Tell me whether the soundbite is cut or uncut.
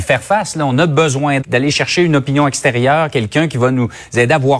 cut